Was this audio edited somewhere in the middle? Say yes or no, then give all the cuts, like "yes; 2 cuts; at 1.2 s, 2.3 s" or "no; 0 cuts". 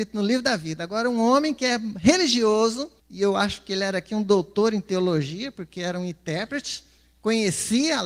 yes; 1 cut; at 3.0 s